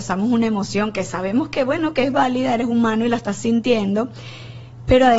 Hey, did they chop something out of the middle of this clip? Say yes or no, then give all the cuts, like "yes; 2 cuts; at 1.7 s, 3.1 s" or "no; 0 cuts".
no; 0 cuts